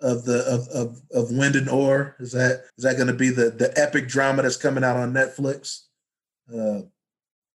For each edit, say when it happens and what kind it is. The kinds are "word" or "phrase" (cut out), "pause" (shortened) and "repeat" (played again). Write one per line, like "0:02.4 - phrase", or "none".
0:02.7 - pause